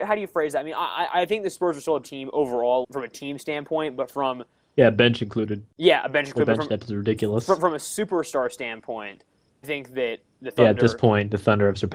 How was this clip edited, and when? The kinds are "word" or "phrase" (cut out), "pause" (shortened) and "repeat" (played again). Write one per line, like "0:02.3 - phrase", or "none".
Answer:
0:02.0 - word
0:02.8 - word
0:09.6 - word